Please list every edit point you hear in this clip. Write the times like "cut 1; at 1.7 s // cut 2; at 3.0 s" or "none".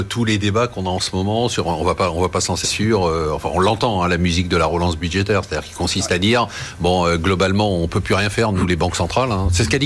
cut 1; at 2.6 s